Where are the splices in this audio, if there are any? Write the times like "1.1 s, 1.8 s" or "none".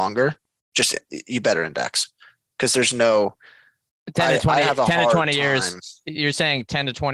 none